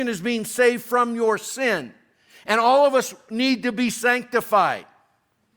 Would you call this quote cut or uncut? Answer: uncut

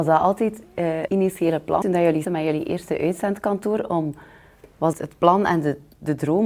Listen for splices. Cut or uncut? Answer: cut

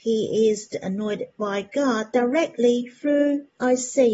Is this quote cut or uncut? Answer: uncut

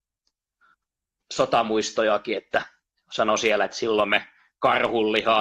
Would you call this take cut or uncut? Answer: uncut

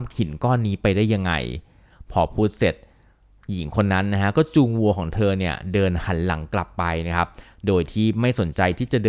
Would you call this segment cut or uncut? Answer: uncut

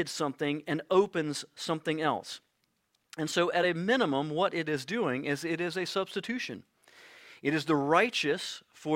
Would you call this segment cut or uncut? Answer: uncut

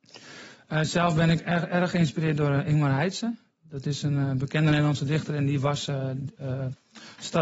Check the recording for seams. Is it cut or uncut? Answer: uncut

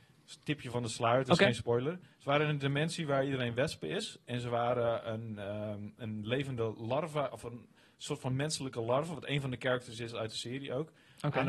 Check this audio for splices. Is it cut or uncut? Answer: uncut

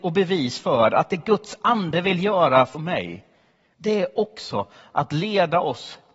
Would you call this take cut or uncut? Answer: cut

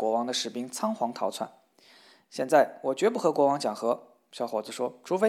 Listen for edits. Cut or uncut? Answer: uncut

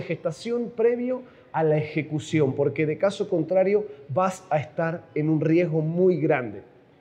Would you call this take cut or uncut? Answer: uncut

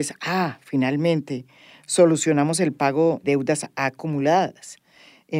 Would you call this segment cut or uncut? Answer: cut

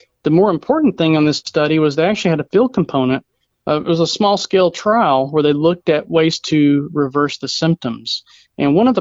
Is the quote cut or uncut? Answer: uncut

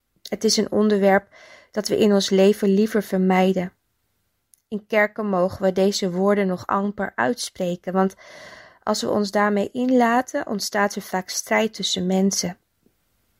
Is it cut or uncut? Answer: uncut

